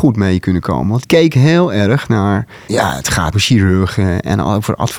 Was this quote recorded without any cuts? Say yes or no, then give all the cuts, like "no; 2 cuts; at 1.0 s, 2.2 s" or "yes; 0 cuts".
no; 2 cuts; at 1.0 s, 3.3 s